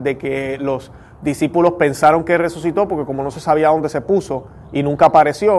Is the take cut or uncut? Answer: uncut